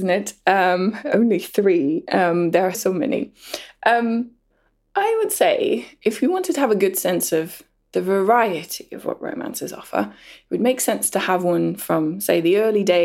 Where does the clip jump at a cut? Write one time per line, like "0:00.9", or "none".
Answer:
0:02.7